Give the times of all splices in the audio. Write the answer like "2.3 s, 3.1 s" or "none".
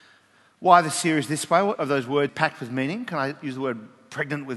1.7 s, 2.3 s